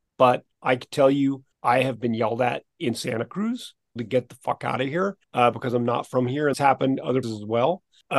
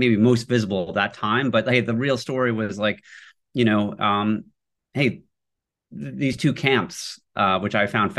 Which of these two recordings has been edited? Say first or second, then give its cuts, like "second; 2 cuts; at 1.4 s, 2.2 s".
first; 6 cuts; at 1.5 s, 2.7 s, 4.0 s, 5.2 s, 6.5 s, 7.2 s